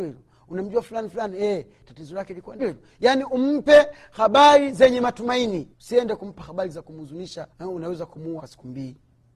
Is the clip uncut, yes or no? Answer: no